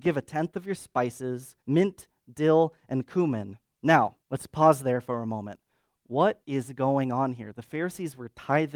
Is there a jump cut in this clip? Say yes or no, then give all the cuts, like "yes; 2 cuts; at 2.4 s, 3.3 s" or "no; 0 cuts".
yes; 3 cuts; at 1.6 s, 4.2 s, 6.4 s